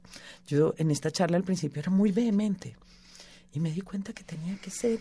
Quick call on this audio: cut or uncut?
uncut